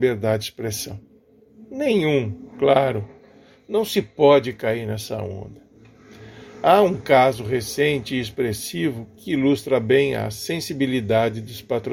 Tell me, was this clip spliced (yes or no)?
no